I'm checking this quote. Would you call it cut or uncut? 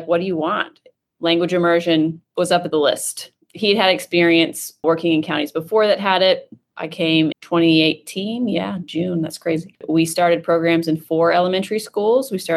cut